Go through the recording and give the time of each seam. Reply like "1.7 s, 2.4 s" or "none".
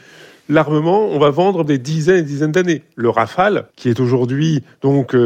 1.6 s, 3.7 s